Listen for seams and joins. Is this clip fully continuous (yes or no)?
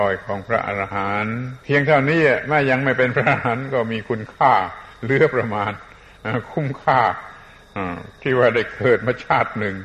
no